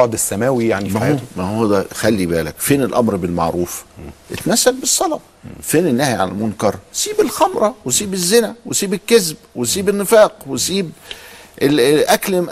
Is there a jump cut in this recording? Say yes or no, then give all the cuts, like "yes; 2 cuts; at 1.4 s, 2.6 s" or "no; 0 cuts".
no; 0 cuts